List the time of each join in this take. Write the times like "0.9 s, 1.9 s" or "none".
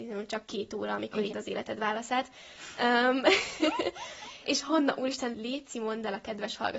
1.3 s, 4.4 s, 5.3 s